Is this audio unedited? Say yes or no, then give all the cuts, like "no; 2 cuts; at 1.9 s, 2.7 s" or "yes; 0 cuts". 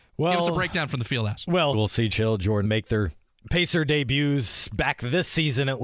no; 3 cuts; at 1.7 s, 2.1 s, 2.6 s